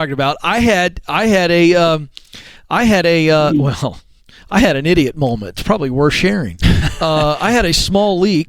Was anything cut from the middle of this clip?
no; 0 cuts

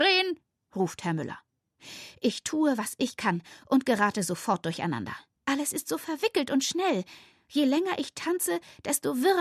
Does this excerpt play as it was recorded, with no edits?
yes; 0 cuts

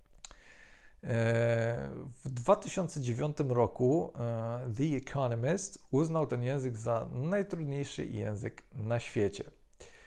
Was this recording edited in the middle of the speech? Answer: no; 0 cuts

